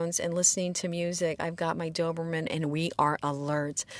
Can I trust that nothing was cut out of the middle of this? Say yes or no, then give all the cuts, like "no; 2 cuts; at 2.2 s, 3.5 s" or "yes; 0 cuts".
yes; 0 cuts